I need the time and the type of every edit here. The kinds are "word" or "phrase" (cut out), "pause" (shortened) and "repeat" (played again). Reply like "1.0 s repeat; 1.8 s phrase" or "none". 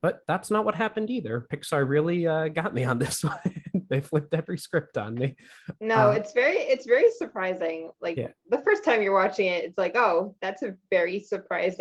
none

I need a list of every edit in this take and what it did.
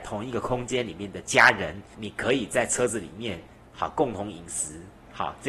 1.9 s word

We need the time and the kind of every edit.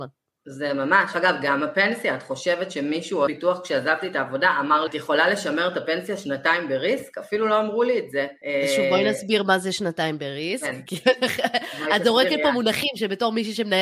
1.1 s word; 3.3 s word; 4.9 s word

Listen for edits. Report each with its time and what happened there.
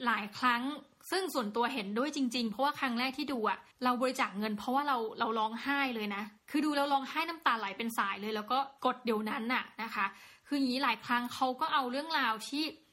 3.7 s pause

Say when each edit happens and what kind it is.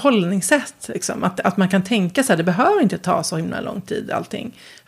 none

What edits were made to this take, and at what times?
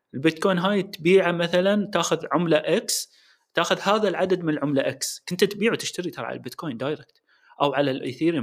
none

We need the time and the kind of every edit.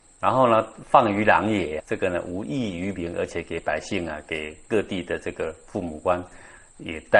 1.8 s word

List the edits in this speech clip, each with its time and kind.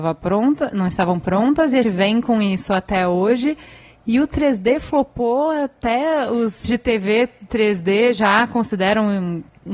1.8 s word; 6.6 s word

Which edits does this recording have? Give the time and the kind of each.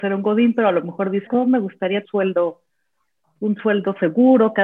1.3 s word; 2.0 s phrase

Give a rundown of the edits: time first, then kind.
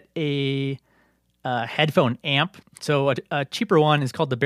2.6 s pause

